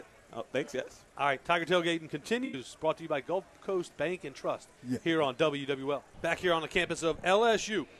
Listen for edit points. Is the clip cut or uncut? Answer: uncut